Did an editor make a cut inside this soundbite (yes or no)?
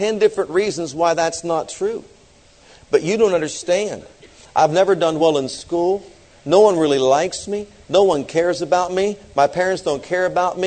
no